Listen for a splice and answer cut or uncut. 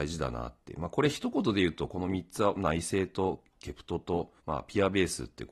cut